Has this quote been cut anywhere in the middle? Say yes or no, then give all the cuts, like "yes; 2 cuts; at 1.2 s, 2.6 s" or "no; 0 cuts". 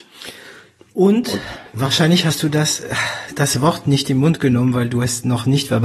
no; 0 cuts